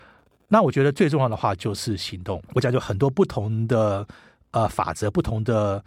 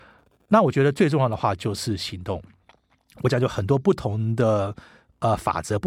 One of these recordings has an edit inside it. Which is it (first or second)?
first